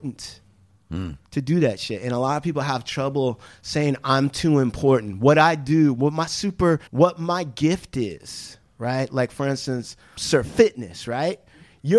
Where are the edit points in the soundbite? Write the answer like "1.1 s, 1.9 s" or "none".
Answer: 1.3 s, 6.9 s, 10.2 s